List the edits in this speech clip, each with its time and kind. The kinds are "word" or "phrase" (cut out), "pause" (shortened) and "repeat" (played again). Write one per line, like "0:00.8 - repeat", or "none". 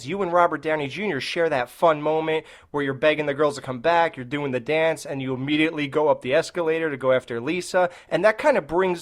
none